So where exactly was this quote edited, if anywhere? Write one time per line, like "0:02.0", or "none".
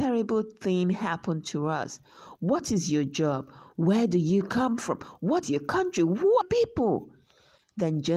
0:05.4
0:06.4